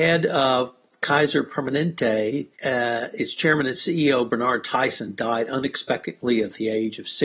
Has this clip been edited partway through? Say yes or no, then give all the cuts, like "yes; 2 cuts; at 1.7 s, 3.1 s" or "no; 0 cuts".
yes; 1 cut; at 2.5 s